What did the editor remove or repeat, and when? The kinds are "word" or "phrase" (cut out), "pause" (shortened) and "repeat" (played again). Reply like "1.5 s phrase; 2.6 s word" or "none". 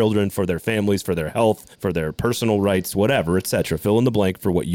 1.7 s pause